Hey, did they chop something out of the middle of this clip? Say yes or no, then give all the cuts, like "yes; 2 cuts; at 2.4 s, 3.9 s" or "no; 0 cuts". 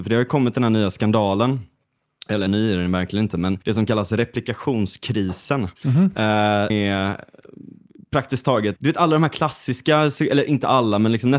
yes; 5 cuts; at 2.5 s, 3.6 s, 5.8 s, 6.7 s, 8.8 s